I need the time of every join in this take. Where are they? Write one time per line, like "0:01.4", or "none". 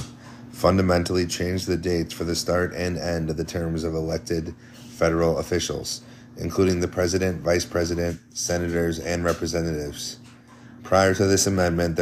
none